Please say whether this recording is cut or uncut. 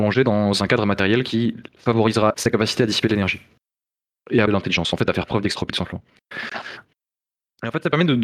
cut